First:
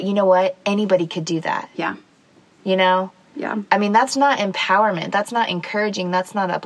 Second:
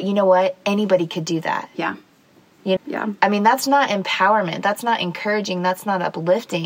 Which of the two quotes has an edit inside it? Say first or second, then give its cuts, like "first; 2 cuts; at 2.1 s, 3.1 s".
second; 1 cut; at 2.8 s